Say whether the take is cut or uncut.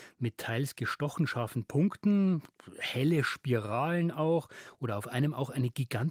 uncut